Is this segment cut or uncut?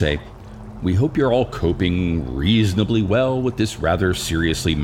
uncut